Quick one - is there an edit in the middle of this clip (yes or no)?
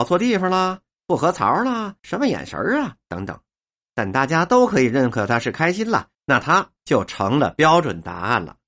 yes